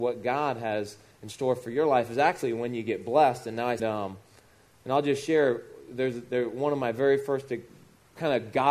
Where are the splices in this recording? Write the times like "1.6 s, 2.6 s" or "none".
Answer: 3.8 s